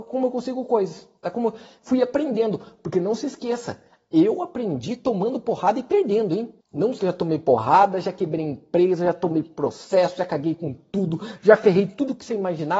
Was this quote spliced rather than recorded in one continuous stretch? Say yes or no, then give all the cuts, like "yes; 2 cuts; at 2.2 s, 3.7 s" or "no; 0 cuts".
yes; 3 cuts; at 1.2 s, 6.6 s, 7.0 s